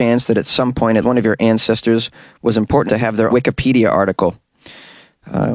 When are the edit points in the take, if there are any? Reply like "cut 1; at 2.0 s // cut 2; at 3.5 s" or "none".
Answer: cut 1; at 1.0 s // cut 2; at 2.9 s // cut 3; at 3.3 s